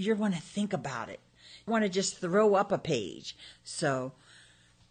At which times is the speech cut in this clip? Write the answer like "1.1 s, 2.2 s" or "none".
1.7 s